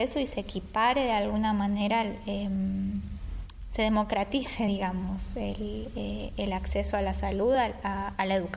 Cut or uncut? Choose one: uncut